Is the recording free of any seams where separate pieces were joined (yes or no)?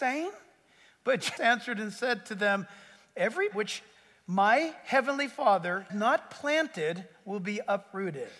no